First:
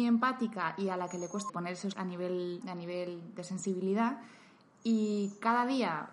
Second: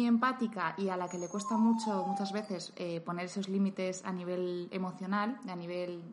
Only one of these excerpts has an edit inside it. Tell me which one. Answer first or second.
first